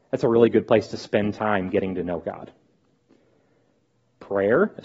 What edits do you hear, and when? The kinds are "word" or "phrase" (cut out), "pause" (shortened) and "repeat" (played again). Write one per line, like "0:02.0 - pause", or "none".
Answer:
none